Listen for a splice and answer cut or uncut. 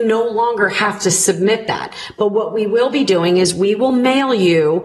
uncut